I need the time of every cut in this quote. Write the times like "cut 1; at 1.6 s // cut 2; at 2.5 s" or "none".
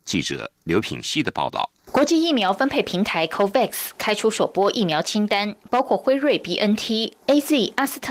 cut 1; at 1.8 s

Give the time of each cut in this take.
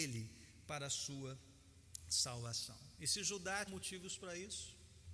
cut 1; at 3.7 s

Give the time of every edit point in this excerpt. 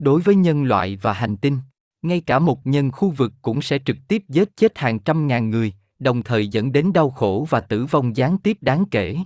cut 1; at 1.8 s // cut 2; at 2.6 s

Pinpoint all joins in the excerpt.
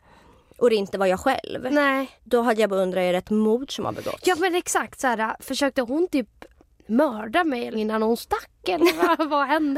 cut 1; at 2.2 s // cut 2; at 7.7 s

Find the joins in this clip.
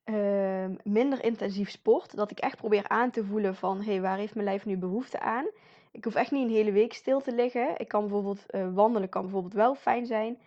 none

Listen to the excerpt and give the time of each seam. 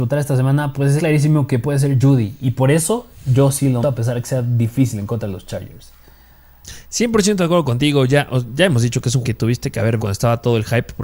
cut 1; at 1.0 s // cut 2; at 2.0 s // cut 3; at 3.8 s // cut 4; at 9.2 s // cut 5; at 10.0 s

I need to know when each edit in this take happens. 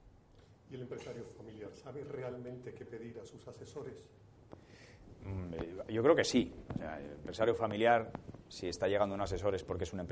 none

